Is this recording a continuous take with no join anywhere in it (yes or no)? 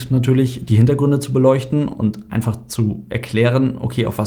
yes